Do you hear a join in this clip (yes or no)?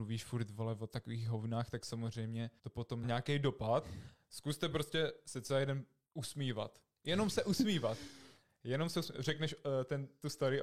yes